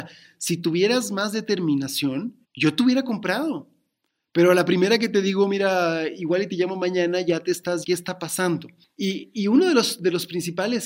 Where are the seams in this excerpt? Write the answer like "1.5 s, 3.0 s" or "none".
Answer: 2.4 s, 7.8 s